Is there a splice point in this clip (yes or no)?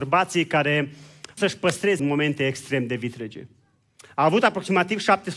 yes